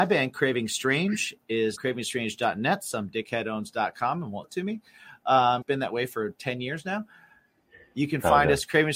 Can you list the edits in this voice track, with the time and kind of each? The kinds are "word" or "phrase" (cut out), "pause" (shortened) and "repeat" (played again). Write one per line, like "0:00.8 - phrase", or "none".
0:01.8 - word
0:04.4 - word
0:05.6 - word